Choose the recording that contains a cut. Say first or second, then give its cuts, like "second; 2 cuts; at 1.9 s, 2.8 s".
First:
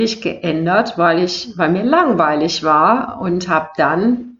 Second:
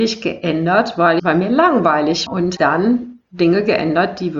second; 3 cuts; at 1.2 s, 2.3 s, 2.6 s